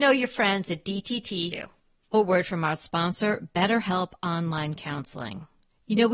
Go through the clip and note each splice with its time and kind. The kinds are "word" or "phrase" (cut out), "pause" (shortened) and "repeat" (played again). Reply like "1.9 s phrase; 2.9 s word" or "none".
1.5 s word; 2.1 s word